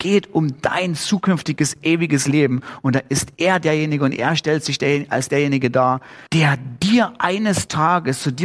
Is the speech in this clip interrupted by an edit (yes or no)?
yes